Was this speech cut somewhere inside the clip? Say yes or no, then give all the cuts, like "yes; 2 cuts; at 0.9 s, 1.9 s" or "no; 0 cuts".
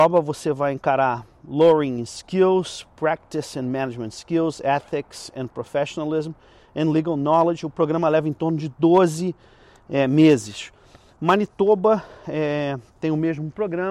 no; 0 cuts